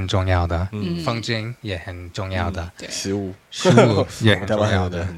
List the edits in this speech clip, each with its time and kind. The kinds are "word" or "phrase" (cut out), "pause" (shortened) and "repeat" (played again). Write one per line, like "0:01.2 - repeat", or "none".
none